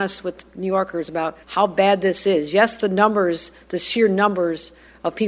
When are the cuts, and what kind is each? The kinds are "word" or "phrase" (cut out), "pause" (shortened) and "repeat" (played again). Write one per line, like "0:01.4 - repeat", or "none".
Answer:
0:01.4 - pause